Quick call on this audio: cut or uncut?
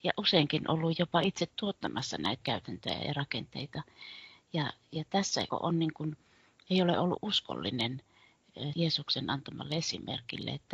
cut